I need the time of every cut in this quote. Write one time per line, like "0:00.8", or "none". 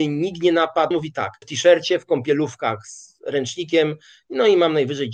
0:00.9
0:01.4